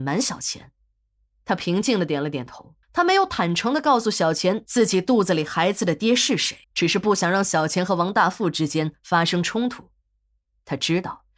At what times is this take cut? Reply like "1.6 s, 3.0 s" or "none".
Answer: 2.8 s, 6.6 s